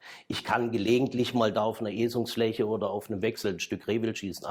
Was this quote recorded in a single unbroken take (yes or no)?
yes